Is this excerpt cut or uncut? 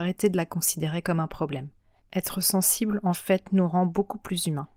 uncut